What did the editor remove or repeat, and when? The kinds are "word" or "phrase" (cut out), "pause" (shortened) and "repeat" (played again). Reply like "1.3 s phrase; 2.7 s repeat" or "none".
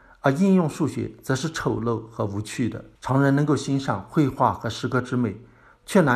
3.0 s pause